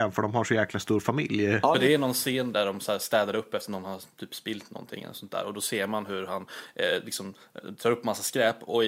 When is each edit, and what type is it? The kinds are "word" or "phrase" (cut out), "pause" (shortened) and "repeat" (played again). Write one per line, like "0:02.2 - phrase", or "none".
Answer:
0:02.5 - word